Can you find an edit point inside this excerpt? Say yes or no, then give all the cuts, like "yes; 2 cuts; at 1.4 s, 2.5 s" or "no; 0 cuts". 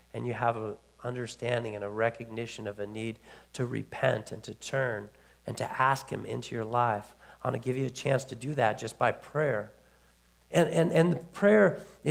no; 0 cuts